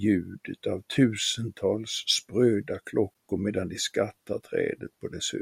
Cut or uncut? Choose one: uncut